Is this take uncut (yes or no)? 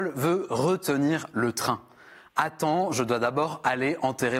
yes